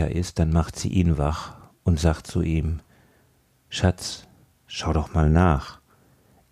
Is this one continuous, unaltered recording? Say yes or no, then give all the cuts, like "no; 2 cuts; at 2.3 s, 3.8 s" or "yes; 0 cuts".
yes; 0 cuts